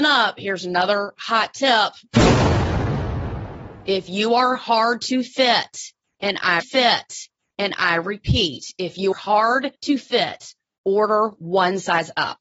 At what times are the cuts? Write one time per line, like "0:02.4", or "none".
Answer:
0:06.6
0:09.1
0:09.7